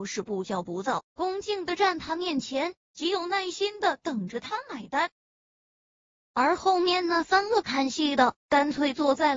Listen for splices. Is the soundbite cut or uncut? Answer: uncut